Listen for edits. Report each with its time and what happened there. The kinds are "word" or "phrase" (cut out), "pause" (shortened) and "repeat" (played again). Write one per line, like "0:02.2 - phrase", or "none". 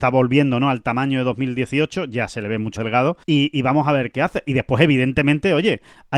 0:02.8 - word
0:03.2 - pause
0:04.1 - word